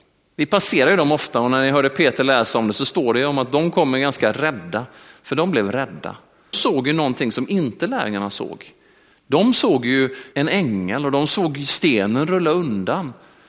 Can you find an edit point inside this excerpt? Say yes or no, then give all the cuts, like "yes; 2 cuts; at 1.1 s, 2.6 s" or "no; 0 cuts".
yes; 2 cuts; at 6.5 s, 10.3 s